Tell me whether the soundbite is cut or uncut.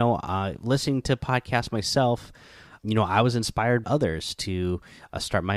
cut